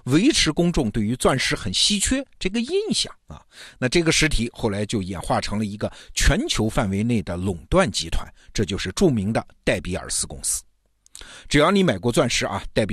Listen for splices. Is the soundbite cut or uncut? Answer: cut